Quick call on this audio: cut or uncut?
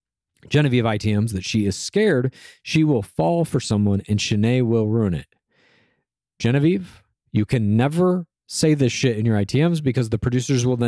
uncut